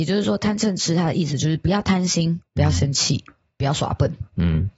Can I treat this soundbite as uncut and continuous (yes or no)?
yes